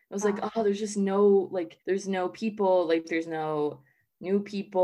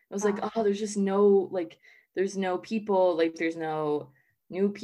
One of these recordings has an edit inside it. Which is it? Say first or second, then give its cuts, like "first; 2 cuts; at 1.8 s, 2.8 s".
first; 1 cut; at 1.8 s